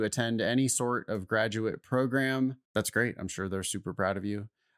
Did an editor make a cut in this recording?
yes; 1 cut; at 2.6 s

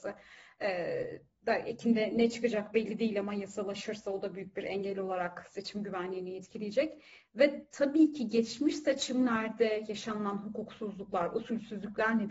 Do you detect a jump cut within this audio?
no; 0 cuts

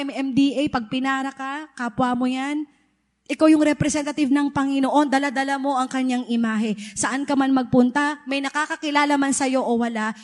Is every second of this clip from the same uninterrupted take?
yes; 0 cuts

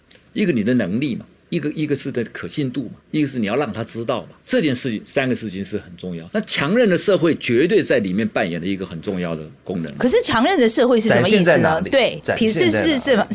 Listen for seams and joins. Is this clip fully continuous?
no; 3 cuts; at 3.0 s, 4.4 s, 6.3 s

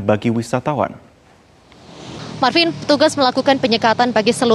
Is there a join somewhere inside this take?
no; 0 cuts

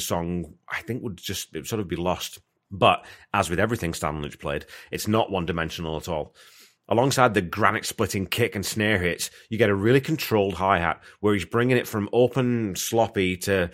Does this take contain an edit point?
no; 0 cuts

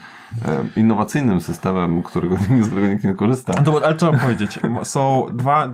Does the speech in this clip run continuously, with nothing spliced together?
no; 1 cut; at 2.7 s

